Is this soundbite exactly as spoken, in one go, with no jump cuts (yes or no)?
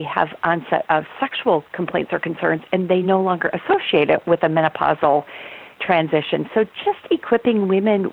yes